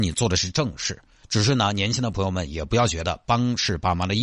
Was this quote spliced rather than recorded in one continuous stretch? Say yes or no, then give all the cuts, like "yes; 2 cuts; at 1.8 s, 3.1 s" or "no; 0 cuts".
no; 0 cuts